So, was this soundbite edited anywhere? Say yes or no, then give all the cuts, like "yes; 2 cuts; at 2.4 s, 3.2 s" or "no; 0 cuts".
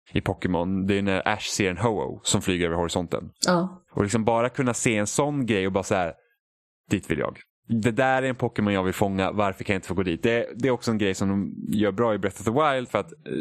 no; 0 cuts